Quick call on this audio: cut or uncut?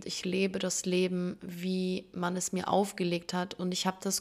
uncut